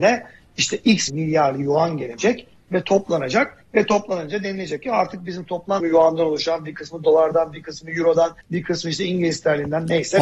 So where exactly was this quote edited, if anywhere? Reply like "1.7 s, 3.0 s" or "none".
1.1 s, 5.8 s, 8.4 s